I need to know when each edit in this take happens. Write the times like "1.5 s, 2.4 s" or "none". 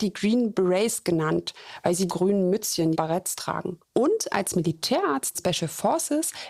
2.1 s, 2.9 s, 3.9 s, 5.3 s

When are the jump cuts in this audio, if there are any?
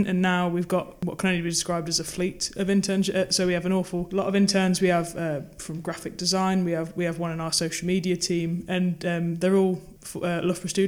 none

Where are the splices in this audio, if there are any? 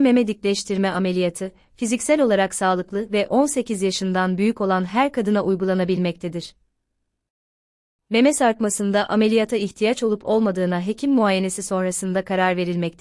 none

